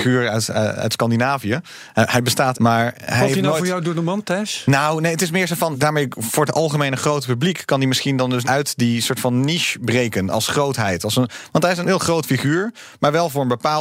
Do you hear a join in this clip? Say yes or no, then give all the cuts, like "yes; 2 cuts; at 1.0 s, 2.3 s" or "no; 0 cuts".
yes; 4 cuts; at 2.5 s, 5.7 s, 8.4 s, 11.8 s